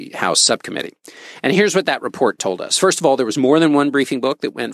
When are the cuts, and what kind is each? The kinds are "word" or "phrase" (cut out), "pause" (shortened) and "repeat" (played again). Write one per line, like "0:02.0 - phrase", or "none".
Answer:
none